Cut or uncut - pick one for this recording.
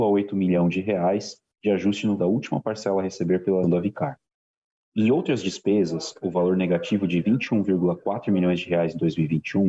cut